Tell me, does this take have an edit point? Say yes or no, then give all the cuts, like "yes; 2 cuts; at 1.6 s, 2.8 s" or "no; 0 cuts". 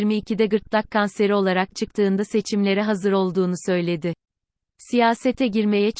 no; 0 cuts